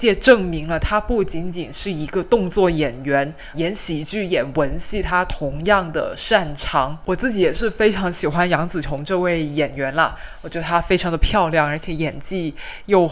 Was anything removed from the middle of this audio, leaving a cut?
yes; 1 cut; at 3.5 s

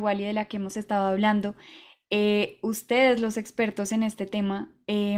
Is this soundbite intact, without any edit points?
yes; 0 cuts

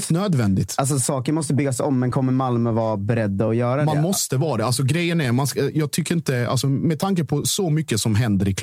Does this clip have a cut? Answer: no; 0 cuts

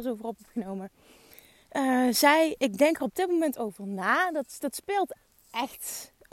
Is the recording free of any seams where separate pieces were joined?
yes; 0 cuts

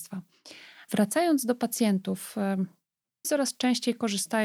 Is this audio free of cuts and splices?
no; 1 cut; at 3.2 s

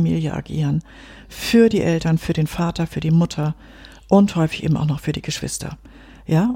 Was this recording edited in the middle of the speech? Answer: no; 0 cuts

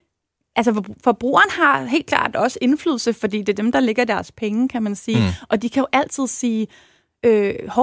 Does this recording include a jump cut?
no; 0 cuts

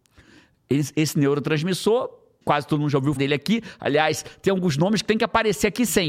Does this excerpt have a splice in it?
yes; 2 cuts; at 2.4 s, 3.2 s

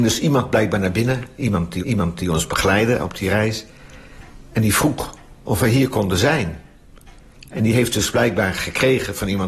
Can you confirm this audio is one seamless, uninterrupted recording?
no; 1 cut; at 1.8 s

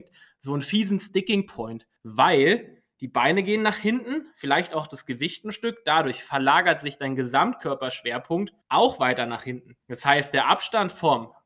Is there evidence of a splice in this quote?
yes; 3 cuts; at 2.0 s, 8.6 s, 9.8 s

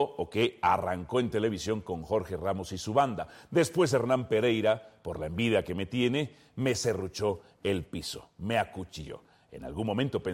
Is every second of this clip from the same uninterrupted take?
yes; 0 cuts

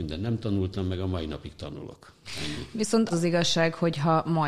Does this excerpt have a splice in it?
yes; 1 cut; at 3.1 s

